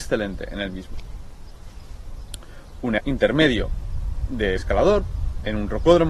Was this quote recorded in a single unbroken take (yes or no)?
no